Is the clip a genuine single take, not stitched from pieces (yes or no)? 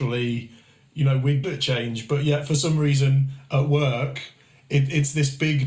no